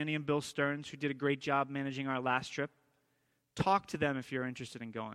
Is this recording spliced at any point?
no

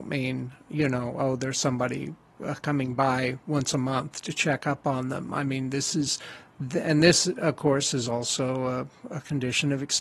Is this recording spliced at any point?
no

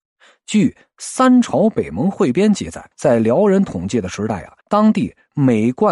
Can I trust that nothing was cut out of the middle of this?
no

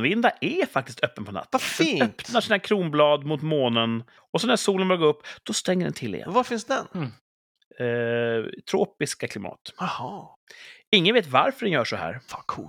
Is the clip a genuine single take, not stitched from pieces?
no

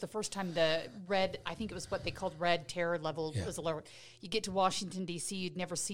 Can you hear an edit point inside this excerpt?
no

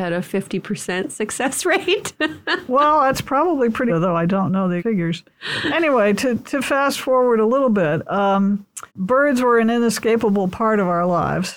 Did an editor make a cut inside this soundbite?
yes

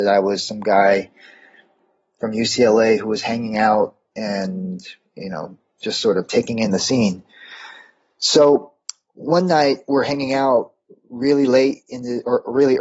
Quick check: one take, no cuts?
yes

